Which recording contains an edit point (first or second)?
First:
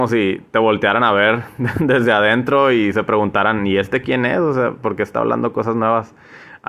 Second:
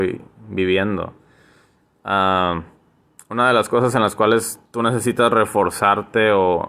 second